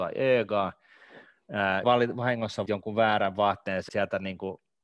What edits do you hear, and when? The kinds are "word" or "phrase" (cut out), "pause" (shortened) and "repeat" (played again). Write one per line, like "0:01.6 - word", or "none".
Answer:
0:01.8 - word
0:02.7 - word
0:03.9 - word